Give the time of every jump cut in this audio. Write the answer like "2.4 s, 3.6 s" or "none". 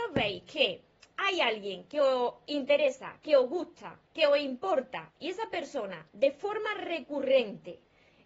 4.1 s